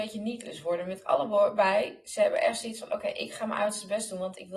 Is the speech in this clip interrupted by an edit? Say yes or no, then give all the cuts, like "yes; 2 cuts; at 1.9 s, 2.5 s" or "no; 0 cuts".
no; 0 cuts